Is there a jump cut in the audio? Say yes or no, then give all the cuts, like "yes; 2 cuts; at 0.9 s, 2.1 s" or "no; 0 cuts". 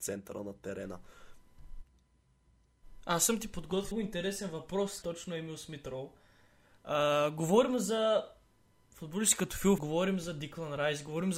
yes; 3 cuts; at 3.9 s, 5.0 s, 9.8 s